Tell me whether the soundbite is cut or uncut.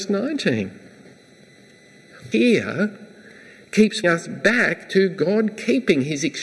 cut